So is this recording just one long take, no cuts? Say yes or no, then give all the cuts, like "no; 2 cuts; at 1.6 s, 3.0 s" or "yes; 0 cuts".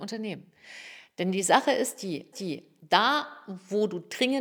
no; 1 cut; at 2.3 s